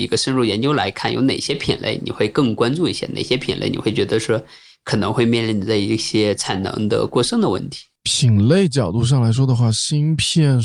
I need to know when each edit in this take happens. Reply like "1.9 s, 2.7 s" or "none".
8.0 s